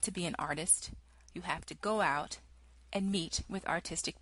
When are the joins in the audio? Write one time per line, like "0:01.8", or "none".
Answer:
none